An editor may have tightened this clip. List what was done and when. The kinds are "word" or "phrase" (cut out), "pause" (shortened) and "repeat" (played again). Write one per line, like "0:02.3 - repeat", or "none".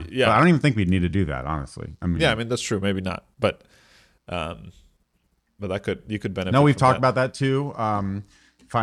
none

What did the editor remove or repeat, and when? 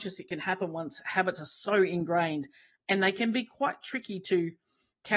none

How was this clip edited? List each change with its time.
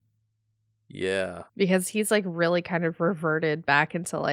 0:01.5 - pause

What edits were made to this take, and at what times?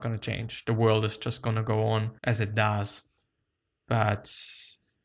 0:02.2 - pause

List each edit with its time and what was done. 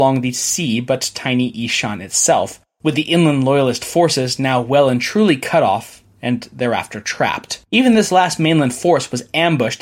0:07.7 - pause

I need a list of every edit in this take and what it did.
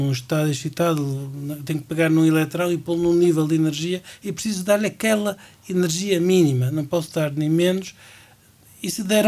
none

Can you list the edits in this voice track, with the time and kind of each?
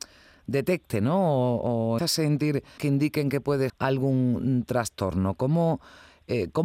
0:02.0 - word
0:02.8 - word
0:03.7 - word

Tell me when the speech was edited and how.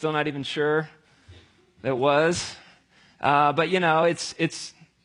none

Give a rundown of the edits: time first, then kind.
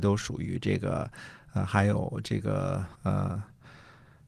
0:02.9 - pause

